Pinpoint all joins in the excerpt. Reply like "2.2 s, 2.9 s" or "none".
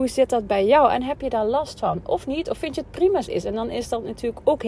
3.2 s

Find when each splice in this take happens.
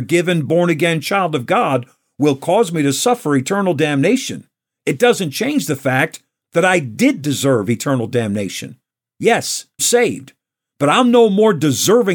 9.8 s

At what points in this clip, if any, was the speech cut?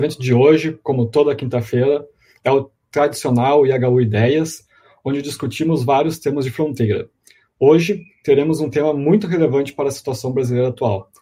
none

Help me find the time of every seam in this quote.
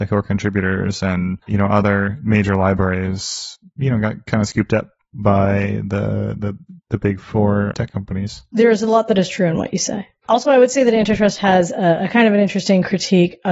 1.4 s, 6.8 s

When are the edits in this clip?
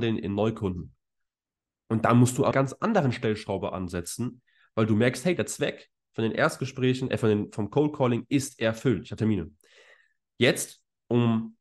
2.5 s, 9.2 s

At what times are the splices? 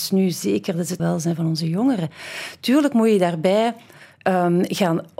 1.0 s

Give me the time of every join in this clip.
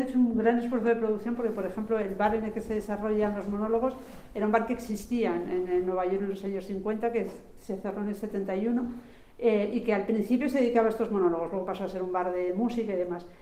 none

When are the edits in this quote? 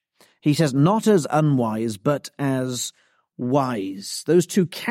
none

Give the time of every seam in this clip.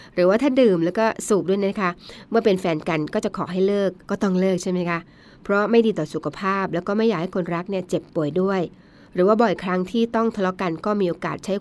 4.0 s

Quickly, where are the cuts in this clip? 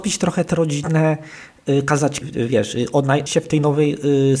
2.2 s, 3.3 s

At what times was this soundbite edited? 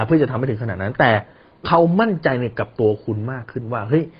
none

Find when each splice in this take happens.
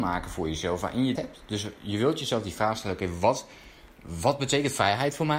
1.1 s

